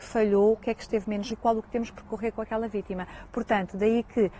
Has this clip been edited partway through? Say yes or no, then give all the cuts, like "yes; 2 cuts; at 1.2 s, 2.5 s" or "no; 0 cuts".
yes; 2 cuts; at 1.3 s, 1.6 s